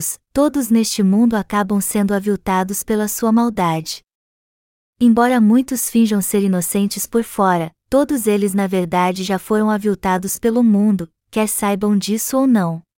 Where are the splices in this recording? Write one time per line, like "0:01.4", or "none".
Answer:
none